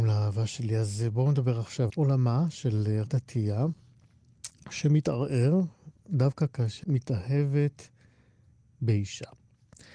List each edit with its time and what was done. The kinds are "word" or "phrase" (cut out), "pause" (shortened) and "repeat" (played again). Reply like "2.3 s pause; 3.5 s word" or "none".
1.9 s word; 3.1 s word; 6.8 s word